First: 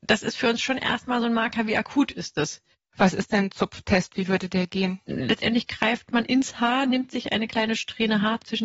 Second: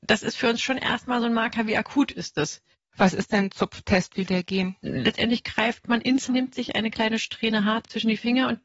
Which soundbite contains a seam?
second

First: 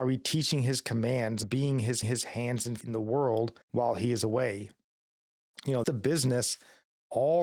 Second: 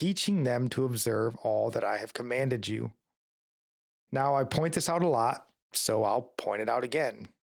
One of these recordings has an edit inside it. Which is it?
first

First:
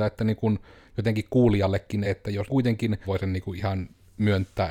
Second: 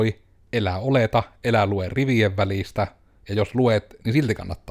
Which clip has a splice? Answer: first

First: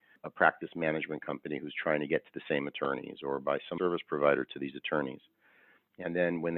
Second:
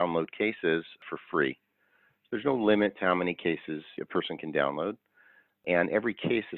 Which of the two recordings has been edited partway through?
first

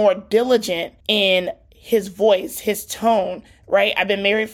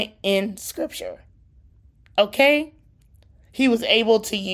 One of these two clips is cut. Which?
first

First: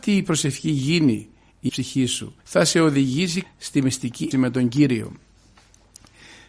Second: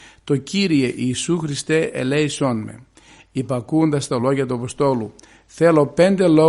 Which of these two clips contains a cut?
first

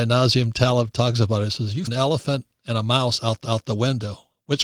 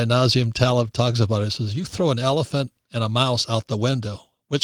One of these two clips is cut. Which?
first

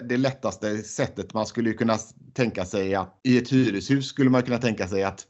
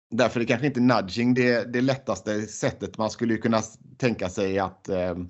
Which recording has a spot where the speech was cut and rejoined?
first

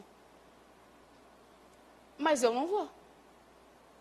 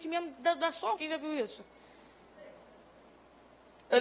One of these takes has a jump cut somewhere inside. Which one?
second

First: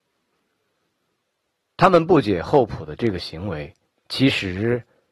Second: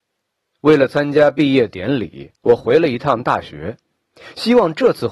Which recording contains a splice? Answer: second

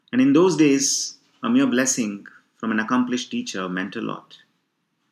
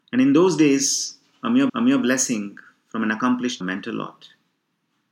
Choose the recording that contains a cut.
second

